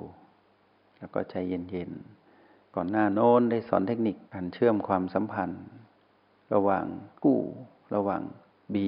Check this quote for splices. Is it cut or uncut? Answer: cut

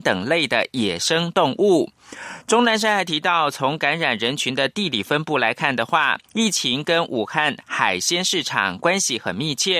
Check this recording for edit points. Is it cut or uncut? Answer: cut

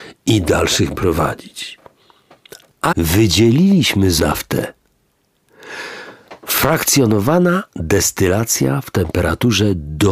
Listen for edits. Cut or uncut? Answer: cut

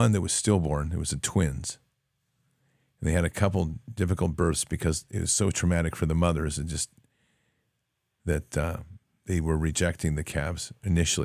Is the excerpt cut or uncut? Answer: uncut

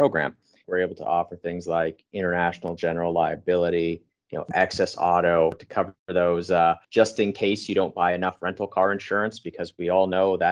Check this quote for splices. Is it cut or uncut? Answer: cut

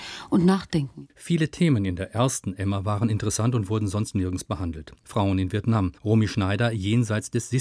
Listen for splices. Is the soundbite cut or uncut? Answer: cut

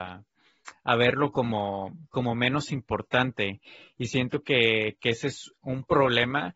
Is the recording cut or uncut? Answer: uncut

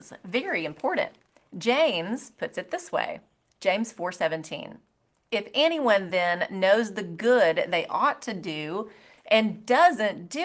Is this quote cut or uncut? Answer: uncut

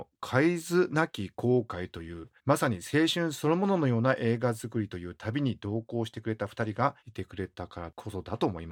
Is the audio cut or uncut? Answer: cut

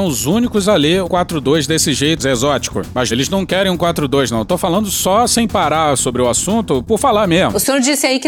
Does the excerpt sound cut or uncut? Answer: cut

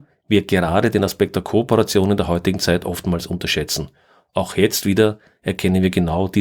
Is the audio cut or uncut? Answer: uncut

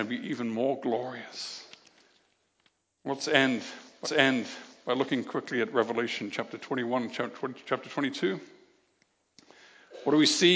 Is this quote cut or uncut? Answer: cut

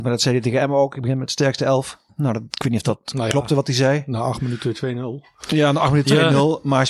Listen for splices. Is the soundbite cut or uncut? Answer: uncut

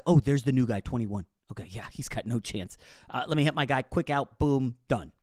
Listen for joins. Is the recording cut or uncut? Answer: uncut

